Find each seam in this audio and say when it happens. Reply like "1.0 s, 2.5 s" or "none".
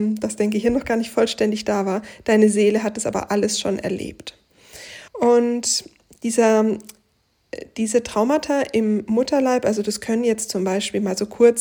5.1 s